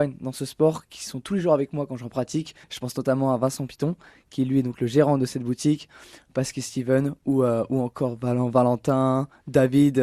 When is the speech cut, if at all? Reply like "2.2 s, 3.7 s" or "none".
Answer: 2.6 s